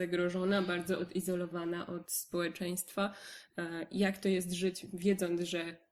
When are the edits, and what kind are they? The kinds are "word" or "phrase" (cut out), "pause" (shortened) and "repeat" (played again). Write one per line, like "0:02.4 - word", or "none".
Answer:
none